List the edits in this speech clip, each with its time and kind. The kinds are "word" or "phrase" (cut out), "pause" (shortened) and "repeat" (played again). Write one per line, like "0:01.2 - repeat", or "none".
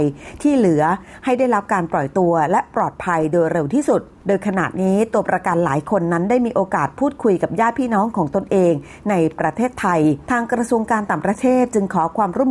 none